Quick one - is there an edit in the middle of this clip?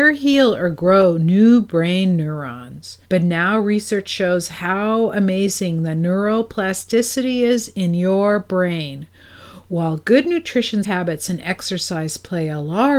yes; 2 cuts; at 3.0 s, 10.8 s

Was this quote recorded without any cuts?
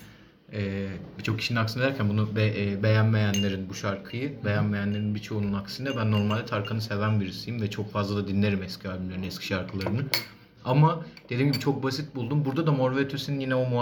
yes; 0 cuts

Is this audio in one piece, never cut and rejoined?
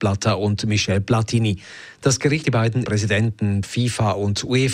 no; 3 cuts; at 2.4 s, 2.9 s, 3.6 s

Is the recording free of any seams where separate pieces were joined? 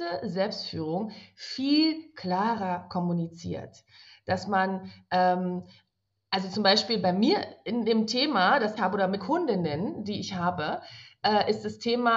no; 2 cuts; at 8.8 s, 9.2 s

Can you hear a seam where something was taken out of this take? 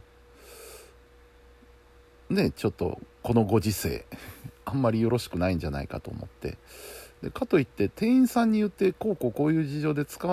no; 0 cuts

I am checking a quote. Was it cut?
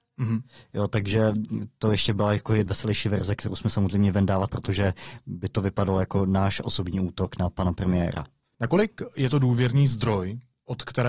yes; 2 cuts; at 2.7 s, 4.5 s

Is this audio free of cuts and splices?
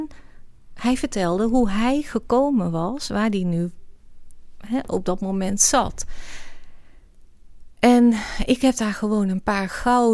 yes; 0 cuts

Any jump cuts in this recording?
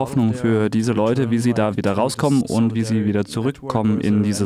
no; 0 cuts

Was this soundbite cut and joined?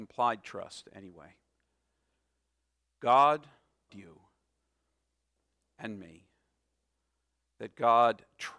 yes; 1 cut; at 3.9 s

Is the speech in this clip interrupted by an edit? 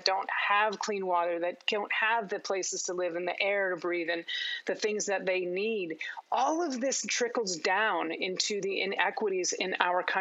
no; 0 cuts

